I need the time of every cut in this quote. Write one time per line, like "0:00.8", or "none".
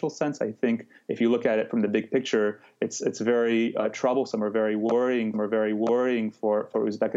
0:05.3